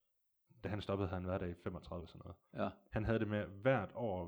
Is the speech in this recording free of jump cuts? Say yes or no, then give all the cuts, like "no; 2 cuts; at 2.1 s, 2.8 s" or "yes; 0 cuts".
no; 1 cut; at 2.0 s